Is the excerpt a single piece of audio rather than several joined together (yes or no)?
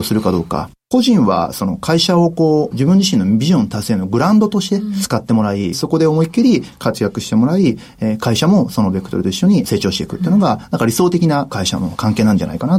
yes